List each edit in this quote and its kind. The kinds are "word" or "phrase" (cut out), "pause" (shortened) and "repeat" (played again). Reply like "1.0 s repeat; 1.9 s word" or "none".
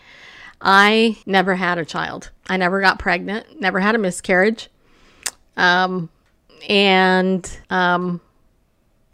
1.2 s pause; 2.4 s pause; 7.6 s pause